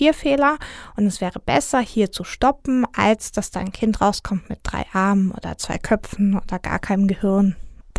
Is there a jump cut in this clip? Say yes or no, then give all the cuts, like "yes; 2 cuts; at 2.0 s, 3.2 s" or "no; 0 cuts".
no; 0 cuts